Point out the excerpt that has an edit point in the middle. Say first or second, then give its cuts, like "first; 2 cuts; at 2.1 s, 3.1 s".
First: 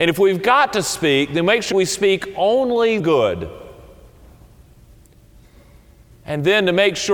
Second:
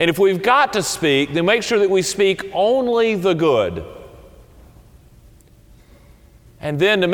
first; 2 cuts; at 1.7 s, 3.0 s